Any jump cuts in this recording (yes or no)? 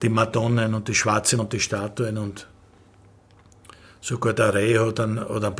yes